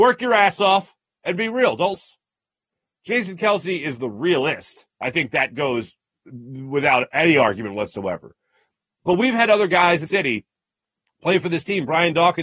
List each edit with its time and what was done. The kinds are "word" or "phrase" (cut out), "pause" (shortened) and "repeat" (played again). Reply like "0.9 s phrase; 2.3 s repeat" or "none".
1.9 s phrase; 10.1 s word